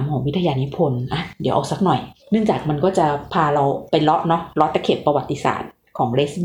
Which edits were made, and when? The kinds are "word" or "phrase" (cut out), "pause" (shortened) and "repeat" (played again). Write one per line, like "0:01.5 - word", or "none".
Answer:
0:02.2 - pause